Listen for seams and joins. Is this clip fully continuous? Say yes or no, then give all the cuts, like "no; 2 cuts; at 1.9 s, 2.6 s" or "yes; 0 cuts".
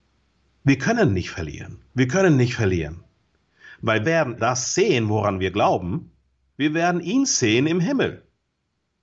no; 4 cuts; at 1.9 s, 4.0 s, 4.4 s, 6.5 s